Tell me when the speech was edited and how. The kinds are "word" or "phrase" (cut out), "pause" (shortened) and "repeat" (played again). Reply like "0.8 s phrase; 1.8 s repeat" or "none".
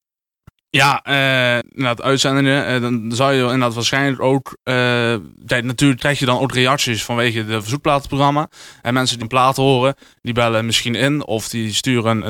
1.6 s word; 6.0 s word; 9.2 s word

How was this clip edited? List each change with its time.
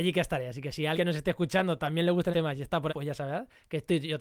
0.9 s word; 2.3 s word; 2.9 s word

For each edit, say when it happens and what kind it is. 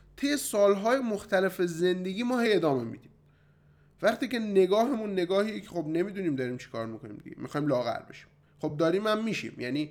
none

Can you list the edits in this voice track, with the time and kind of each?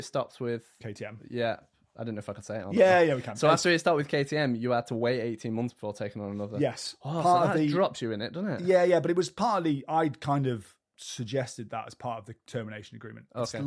10.9 s pause

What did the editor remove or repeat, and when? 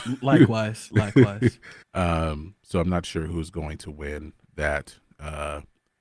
1.8 s pause

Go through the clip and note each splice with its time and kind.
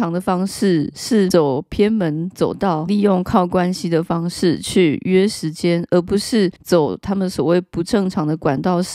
6.6 s pause

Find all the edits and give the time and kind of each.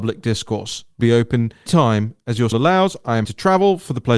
1.0 s word; 1.7 s word; 2.5 s word; 3.2 s word

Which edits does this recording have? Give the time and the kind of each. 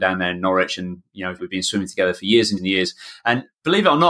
1.4 s phrase; 2.6 s word

